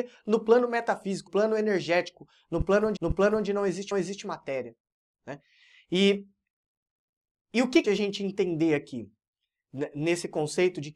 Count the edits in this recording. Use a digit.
4